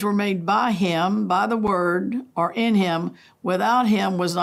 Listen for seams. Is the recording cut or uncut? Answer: uncut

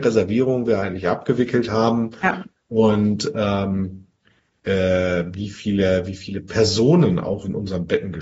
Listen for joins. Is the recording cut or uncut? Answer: uncut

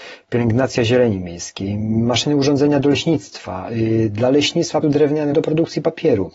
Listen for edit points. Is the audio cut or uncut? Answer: cut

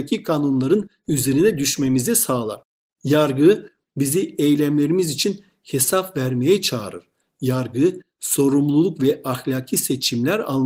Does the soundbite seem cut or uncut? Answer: uncut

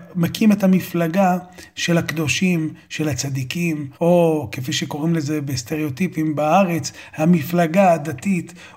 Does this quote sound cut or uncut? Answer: cut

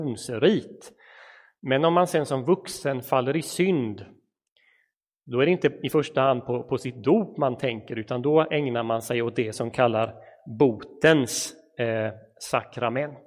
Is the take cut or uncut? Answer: uncut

